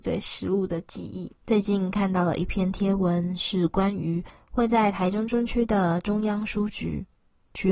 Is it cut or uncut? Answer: cut